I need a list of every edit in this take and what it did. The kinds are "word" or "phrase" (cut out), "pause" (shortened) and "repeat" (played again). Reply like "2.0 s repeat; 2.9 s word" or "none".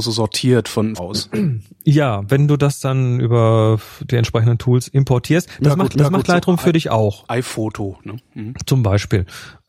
1.0 s phrase; 5.9 s repeat